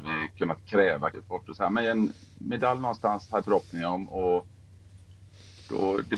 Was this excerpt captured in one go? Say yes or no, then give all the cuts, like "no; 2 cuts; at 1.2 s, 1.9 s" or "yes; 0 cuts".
no; 2 cuts; at 1.1 s, 3.4 s